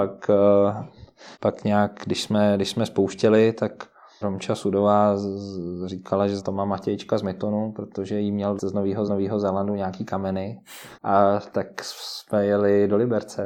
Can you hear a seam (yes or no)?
yes